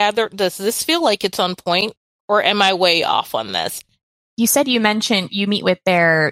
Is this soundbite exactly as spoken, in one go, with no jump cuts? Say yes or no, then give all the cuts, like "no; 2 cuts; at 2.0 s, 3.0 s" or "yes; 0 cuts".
yes; 0 cuts